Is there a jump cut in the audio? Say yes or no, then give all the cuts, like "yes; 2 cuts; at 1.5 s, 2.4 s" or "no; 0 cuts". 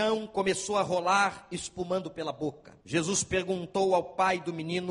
yes; 1 cut; at 2.8 s